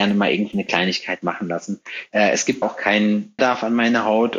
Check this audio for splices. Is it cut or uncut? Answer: cut